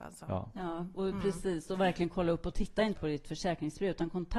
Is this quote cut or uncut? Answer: cut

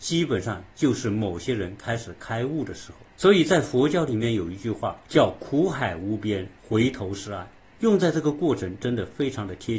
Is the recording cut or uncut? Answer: cut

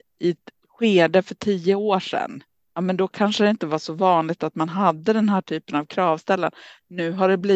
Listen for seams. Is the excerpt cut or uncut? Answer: uncut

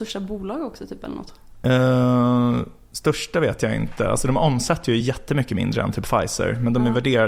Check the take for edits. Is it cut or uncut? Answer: uncut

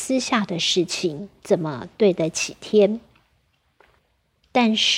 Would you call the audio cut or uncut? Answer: uncut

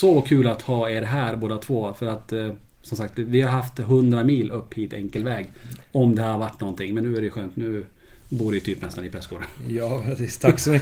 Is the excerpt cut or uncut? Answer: uncut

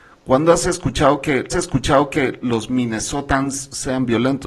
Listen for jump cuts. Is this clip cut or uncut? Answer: cut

